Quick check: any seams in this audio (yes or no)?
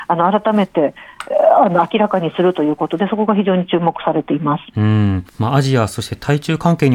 yes